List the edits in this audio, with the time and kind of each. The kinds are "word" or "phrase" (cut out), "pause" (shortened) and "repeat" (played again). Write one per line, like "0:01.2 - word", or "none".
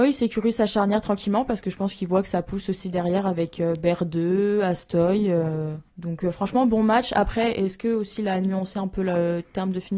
0:05.9 - pause

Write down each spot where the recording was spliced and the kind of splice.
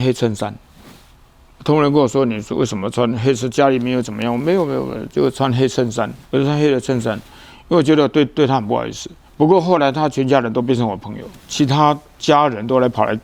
0:06.2 - pause
0:09.2 - pause
0:11.4 - pause

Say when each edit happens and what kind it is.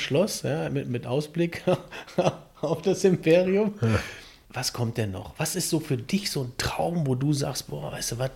none

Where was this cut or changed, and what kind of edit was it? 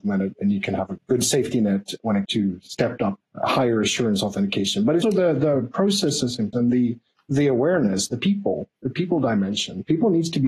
0:01.0 - word
0:02.2 - word
0:03.2 - word
0:05.0 - word
0:06.5 - word

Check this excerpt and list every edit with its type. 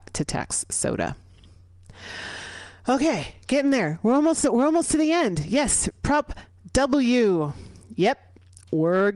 none

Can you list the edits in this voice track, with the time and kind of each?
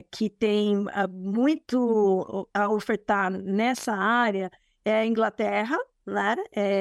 none

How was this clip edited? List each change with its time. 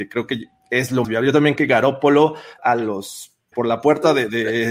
0:01.0 - word
0:01.6 - word
0:02.6 - word
0:03.5 - phrase

